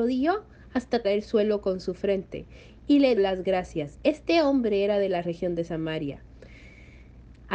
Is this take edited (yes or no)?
yes